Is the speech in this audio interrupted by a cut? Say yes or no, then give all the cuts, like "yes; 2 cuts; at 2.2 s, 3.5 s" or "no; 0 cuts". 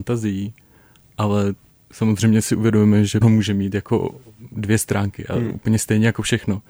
yes; 2 cuts; at 1.8 s, 3.2 s